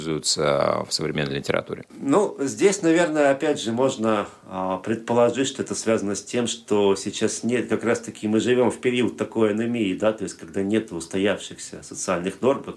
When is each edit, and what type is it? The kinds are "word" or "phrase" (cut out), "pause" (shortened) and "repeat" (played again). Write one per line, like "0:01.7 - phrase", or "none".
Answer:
0:01.9 - pause